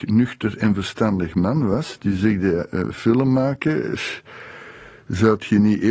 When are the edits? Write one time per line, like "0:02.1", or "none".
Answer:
none